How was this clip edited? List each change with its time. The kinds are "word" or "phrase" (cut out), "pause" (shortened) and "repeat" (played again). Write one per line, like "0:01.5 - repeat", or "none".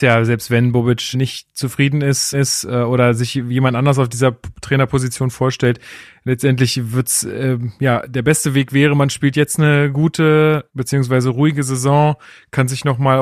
0:01.1 - word
0:02.3 - repeat
0:10.7 - word